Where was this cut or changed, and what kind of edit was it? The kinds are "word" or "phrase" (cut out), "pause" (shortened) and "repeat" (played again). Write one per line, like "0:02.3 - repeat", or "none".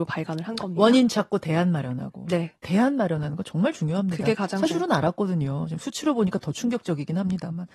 0:04.7 - word